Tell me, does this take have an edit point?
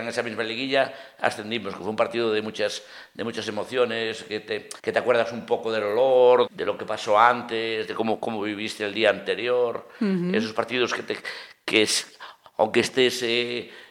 yes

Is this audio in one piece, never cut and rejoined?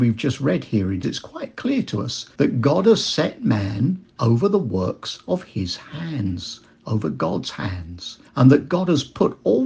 no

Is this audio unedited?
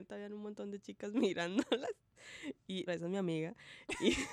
no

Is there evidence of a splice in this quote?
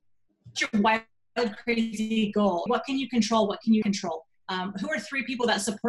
yes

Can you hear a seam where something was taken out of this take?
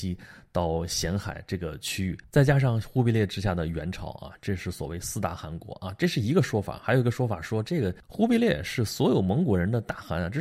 yes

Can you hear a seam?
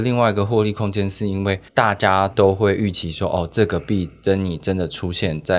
yes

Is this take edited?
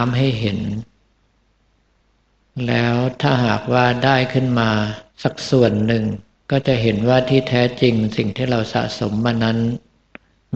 yes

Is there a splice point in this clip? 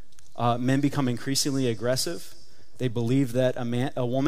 no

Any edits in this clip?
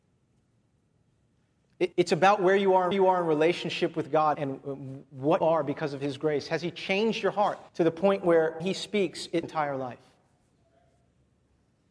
yes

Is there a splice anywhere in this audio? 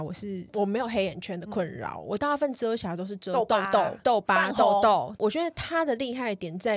yes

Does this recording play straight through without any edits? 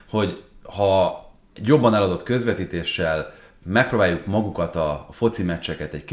yes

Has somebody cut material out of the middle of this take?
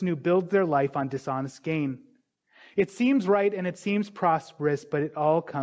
no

